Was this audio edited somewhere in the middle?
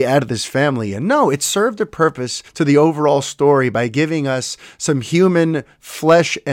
yes; 1 cut; at 2.5 s

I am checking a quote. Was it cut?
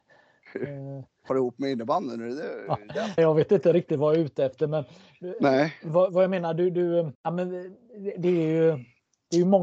yes; 4 cuts; at 1.3 s, 3.2 s, 7.1 s, 8.1 s

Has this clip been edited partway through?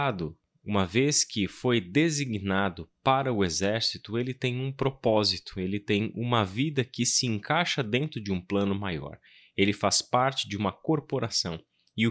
no; 0 cuts

